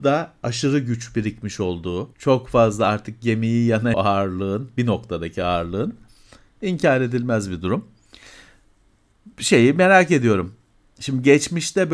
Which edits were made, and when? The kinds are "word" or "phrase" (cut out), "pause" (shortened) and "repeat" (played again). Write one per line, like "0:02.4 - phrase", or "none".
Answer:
0:02.1 - pause
0:03.9 - phrase

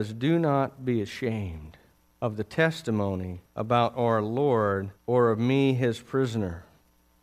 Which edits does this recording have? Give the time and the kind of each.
0:02.0 - pause
0:03.5 - pause
0:04.9 - pause

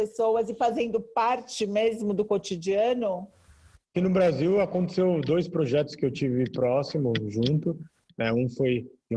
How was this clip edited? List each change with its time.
none

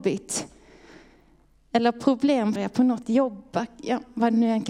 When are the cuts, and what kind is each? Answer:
0:02.6 - word
0:03.0 - word

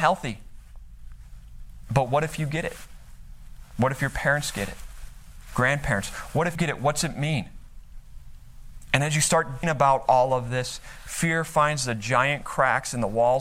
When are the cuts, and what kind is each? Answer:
0:06.6 - word
0:09.6 - word

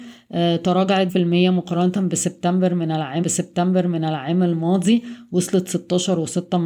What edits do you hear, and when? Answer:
0:01.1 - word
0:03.2 - repeat

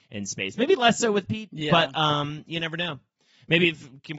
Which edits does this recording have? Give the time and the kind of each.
none

